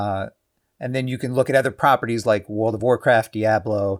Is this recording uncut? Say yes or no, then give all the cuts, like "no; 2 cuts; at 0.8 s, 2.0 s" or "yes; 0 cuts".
yes; 0 cuts